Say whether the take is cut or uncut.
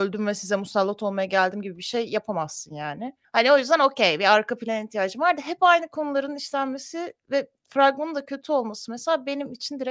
cut